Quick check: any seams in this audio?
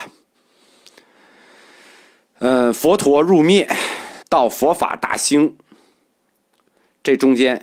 yes; 1 cut; at 4.2 s

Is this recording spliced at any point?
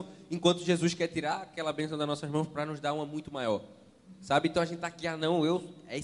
no; 0 cuts

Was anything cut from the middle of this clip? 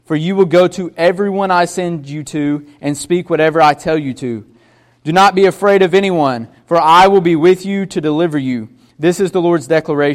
no; 0 cuts

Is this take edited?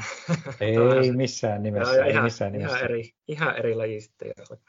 yes; 1 cut; at 3.2 s

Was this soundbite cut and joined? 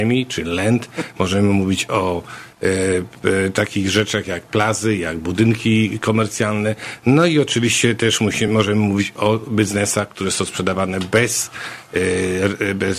no; 0 cuts

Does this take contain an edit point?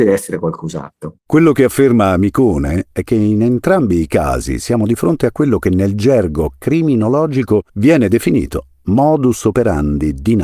yes; 2 cuts; at 1.2 s, 7.7 s

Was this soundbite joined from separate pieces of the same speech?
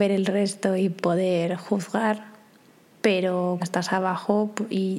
yes; 2 cuts; at 1.0 s, 3.6 s

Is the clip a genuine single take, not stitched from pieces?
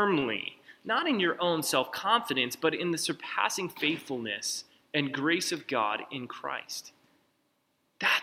yes; 0 cuts

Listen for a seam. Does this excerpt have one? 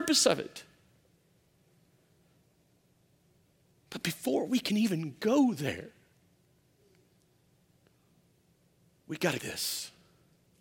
yes; 1 cut; at 9.4 s

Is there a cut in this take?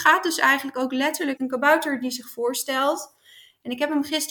yes; 1 cut; at 1.4 s

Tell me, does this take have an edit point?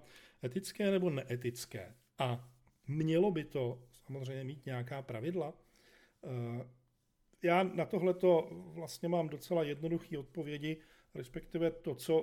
no; 0 cuts

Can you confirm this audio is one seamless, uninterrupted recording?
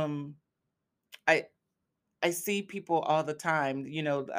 yes; 0 cuts

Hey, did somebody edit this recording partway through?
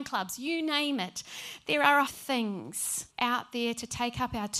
yes; 2 cuts; at 2.1 s, 3.1 s

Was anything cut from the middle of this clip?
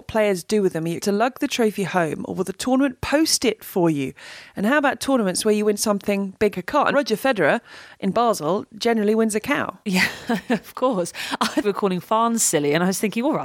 yes; 5 cuts; at 1.0 s, 6.5 s, 6.9 s, 9.8 s, 11.6 s

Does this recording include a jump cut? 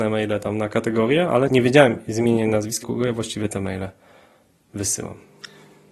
yes; 2 cuts; at 1.5 s, 2.8 s

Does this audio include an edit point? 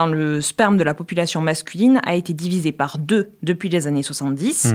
no; 0 cuts

